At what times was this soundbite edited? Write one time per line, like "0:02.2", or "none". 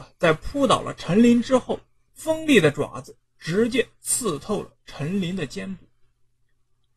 none